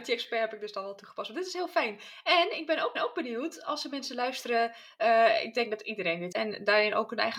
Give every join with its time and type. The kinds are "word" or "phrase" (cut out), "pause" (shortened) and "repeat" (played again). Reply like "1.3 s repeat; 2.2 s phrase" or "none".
3.0 s repeat; 6.3 s word